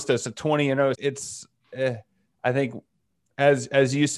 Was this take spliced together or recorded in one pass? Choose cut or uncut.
cut